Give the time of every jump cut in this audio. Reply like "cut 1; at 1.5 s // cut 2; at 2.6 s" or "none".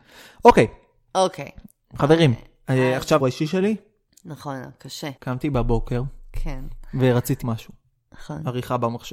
cut 1; at 3.2 s // cut 2; at 5.2 s // cut 3; at 7.4 s